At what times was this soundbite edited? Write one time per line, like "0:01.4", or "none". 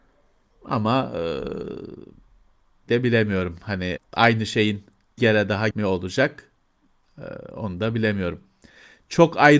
0:02.9
0:04.0
0:05.2
0:05.7

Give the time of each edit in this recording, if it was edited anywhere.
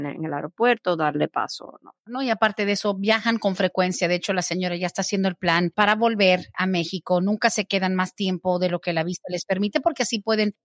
0:02.0

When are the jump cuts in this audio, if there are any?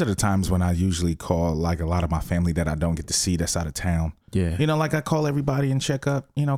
none

